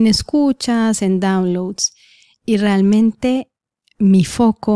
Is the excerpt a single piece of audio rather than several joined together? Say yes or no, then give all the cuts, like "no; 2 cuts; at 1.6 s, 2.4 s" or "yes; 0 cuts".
yes; 0 cuts